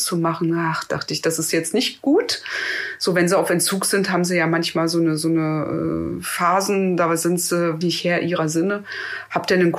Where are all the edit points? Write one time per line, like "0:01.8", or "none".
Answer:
0:07.8